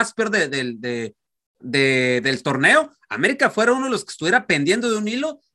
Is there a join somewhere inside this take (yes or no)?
no